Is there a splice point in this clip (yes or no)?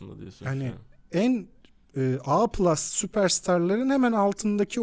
no